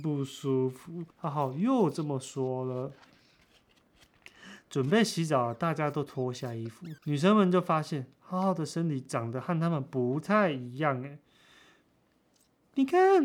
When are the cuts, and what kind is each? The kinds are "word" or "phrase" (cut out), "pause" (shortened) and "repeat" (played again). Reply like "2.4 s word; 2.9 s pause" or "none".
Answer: 1.1 s pause; 7.0 s pause